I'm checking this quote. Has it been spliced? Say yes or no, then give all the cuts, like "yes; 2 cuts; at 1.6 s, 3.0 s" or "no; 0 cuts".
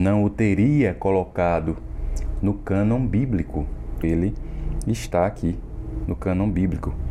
yes; 1 cut; at 4.0 s